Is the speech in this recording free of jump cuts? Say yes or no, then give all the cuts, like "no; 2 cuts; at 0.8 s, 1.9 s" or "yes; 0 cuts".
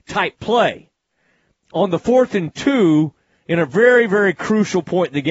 yes; 0 cuts